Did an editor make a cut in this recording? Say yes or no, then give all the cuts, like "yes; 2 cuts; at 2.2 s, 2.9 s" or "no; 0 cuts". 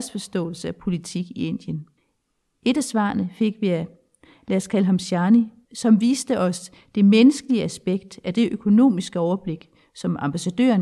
no; 0 cuts